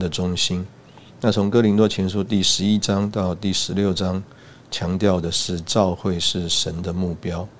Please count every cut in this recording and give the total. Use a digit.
1